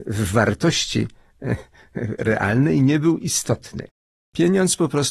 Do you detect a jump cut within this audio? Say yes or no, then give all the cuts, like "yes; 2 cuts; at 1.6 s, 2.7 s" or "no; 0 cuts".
no; 0 cuts